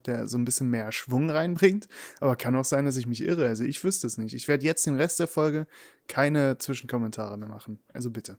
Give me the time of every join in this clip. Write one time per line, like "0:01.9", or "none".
none